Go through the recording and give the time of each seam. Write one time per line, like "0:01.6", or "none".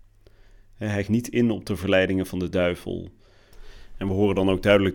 0:01.1